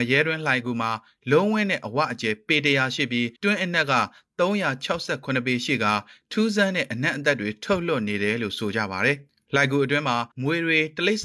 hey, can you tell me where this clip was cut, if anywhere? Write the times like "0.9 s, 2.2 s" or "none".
3.4 s, 10.3 s